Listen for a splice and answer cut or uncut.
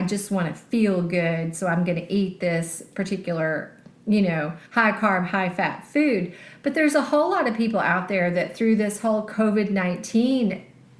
cut